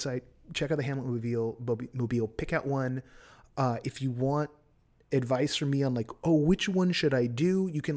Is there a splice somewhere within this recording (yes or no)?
no